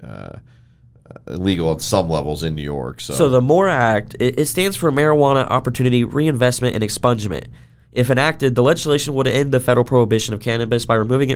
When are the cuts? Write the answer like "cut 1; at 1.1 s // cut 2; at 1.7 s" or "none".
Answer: none